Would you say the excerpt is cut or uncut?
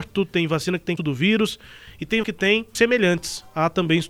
cut